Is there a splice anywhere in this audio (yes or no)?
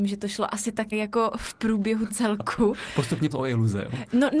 yes